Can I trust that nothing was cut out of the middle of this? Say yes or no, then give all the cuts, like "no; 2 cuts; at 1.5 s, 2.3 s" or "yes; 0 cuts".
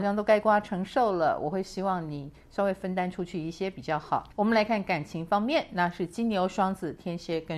no; 1 cut; at 4.3 s